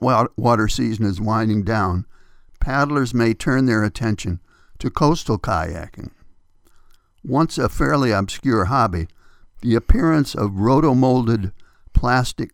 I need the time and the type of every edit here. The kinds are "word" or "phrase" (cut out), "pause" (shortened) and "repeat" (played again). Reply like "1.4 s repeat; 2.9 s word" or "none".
none